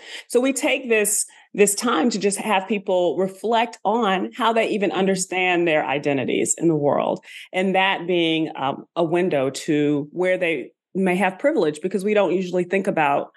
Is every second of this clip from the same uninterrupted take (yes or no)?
yes